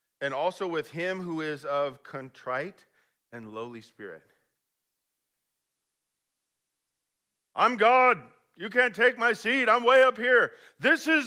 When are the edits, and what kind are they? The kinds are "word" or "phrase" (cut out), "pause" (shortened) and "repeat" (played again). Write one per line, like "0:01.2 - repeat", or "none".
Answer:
none